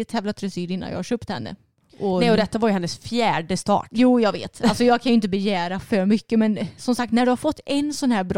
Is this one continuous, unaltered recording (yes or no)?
yes